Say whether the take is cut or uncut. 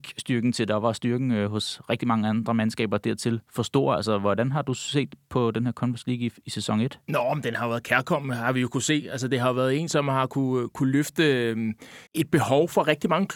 cut